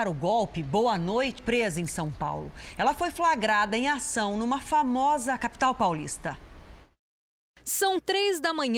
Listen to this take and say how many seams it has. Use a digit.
2